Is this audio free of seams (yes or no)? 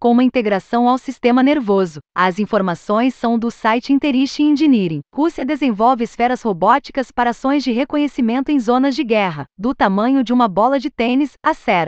no